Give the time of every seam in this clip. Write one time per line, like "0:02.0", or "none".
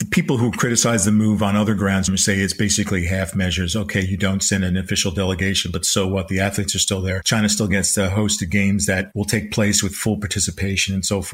none